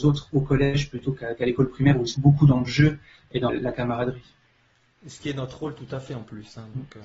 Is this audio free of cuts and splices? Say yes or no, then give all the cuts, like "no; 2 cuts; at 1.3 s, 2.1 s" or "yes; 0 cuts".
no; 2 cuts; at 2.1 s, 3.5 s